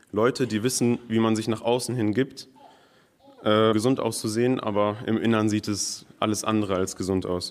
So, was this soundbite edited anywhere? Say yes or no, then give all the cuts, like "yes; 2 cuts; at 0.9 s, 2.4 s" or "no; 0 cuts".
yes; 1 cut; at 3.7 s